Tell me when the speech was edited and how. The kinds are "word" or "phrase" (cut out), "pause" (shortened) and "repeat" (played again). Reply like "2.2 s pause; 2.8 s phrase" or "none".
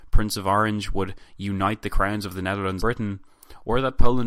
2.8 s word